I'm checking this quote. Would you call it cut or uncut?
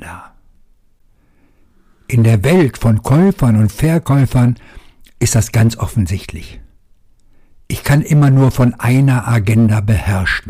uncut